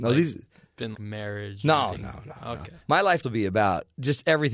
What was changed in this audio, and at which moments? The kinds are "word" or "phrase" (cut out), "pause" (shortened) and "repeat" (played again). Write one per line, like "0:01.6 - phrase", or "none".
0:00.9 - word
0:01.9 - word
0:03.2 - word